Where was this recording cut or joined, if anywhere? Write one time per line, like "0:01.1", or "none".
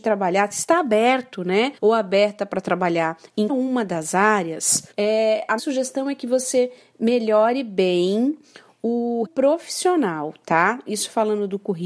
0:01.8
0:03.5
0:04.9
0:05.6
0:09.2